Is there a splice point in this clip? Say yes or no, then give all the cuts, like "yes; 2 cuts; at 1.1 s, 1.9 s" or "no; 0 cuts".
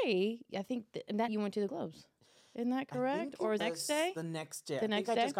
yes; 3 cuts; at 1.3 s, 1.7 s, 3.6 s